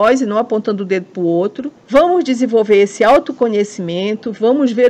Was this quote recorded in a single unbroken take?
no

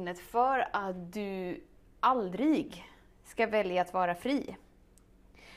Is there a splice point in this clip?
no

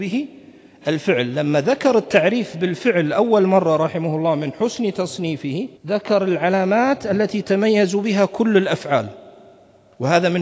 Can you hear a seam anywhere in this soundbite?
yes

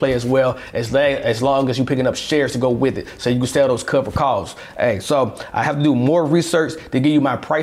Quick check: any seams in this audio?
no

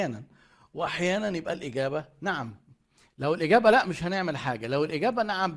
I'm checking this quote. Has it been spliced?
no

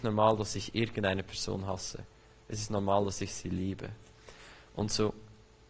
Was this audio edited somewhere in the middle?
no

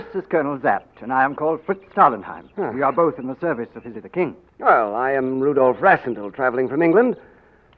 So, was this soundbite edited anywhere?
yes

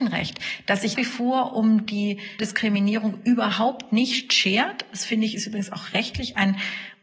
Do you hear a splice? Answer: yes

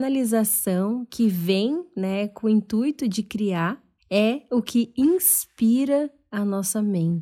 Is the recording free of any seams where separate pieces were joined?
no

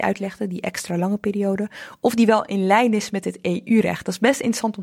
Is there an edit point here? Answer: no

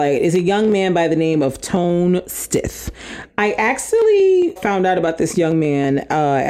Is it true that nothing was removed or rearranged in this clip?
no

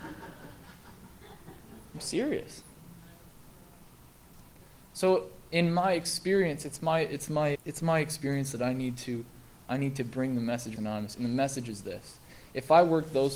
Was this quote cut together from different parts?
yes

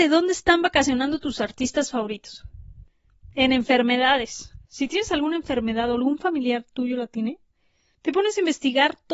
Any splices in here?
yes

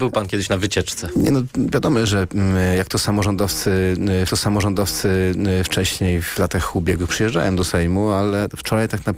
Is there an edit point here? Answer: yes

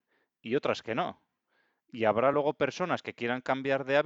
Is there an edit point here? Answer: no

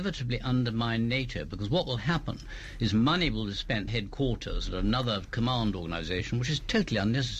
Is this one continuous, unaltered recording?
no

